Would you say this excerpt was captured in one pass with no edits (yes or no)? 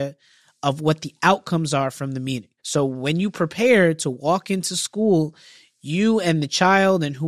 yes